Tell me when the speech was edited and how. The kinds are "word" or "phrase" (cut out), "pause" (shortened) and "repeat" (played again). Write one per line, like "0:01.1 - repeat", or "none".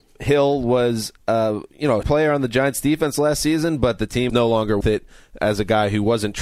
0:01.2 - pause
0:02.0 - word
0:04.3 - phrase
0:04.8 - word
0:05.4 - word